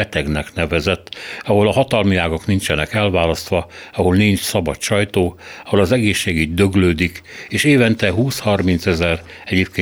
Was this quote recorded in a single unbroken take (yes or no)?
yes